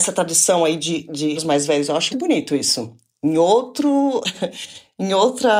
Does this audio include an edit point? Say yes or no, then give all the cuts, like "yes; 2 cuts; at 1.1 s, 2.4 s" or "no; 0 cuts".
yes; 2 cuts; at 1.4 s, 2.1 s